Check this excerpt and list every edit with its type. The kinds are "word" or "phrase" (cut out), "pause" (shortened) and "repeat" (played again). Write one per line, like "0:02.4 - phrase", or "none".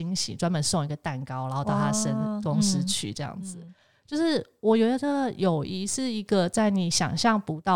none